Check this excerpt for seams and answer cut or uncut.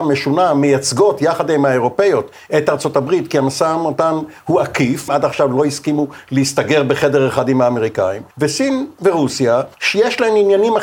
cut